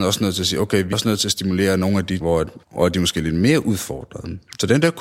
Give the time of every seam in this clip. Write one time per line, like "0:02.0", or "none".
0:00.9
0:02.2
0:02.6